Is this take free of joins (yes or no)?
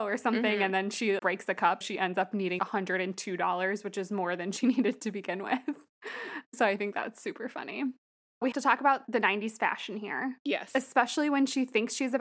no